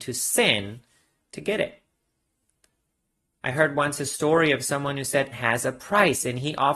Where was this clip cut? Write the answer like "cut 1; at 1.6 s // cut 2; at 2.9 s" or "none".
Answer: cut 1; at 5.3 s